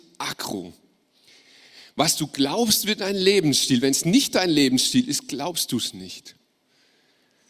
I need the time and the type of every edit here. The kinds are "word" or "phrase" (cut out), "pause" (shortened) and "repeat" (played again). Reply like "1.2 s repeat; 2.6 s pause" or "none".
none